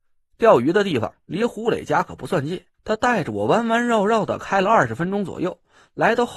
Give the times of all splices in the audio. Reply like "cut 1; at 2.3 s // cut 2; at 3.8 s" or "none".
cut 1; at 2.7 s

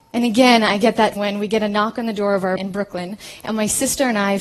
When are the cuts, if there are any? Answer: cut 1; at 1.2 s // cut 2; at 2.6 s

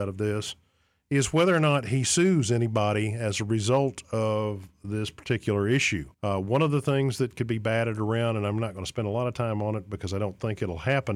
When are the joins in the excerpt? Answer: cut 1; at 6.1 s

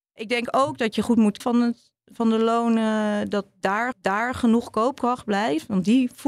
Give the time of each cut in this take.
cut 1; at 1.4 s // cut 2; at 3.9 s

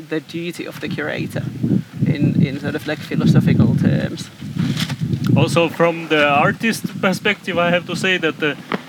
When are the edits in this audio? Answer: none

